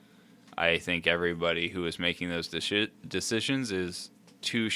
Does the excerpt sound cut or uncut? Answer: uncut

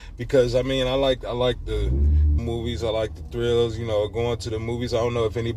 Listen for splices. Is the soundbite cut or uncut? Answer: cut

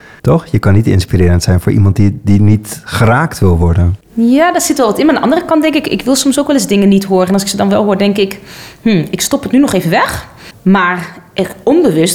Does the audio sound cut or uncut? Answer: uncut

